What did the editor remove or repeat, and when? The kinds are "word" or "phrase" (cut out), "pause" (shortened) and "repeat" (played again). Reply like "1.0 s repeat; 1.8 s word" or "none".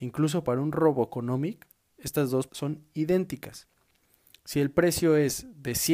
2.5 s word

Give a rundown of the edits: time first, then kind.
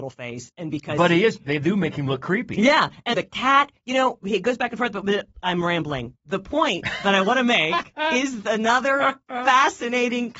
3.1 s word

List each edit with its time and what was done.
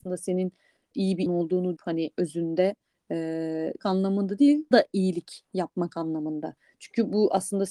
0.9 s word; 1.3 s word; 1.8 s word; 3.8 s word; 4.7 s word

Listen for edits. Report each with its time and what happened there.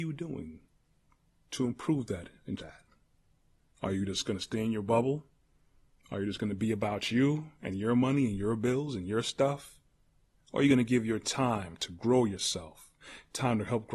2.6 s word

